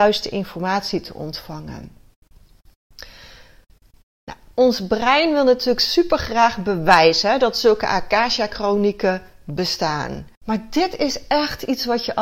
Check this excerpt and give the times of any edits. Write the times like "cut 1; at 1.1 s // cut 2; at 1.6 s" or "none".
cut 1; at 10.3 s